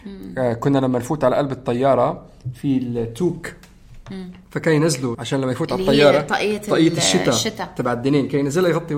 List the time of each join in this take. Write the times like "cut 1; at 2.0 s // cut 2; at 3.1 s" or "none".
cut 1; at 4.4 s // cut 2; at 5.1 s